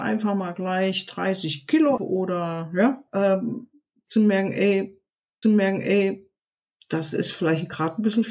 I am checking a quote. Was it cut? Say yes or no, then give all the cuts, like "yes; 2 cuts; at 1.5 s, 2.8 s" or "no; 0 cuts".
yes; 3 cuts; at 2.0 s, 3.1 s, 5.4 s